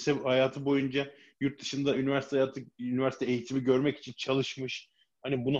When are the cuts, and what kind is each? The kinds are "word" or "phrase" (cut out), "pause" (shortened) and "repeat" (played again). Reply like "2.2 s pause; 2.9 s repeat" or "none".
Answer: none